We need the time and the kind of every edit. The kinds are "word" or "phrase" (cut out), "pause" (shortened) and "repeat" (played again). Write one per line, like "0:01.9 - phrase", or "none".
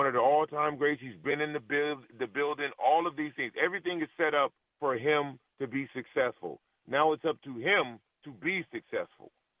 0:04.6 - pause
0:08.1 - pause